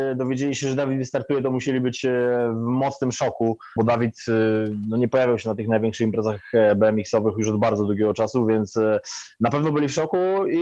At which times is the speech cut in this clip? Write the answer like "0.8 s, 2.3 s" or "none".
3.8 s